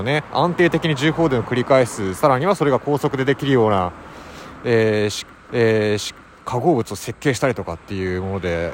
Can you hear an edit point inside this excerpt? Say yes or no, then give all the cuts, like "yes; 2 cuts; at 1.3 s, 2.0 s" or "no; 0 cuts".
yes; 1 cut; at 5.5 s